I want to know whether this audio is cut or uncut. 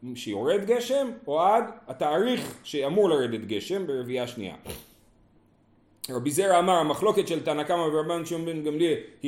uncut